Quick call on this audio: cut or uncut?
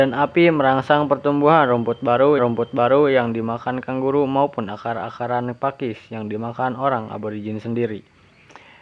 cut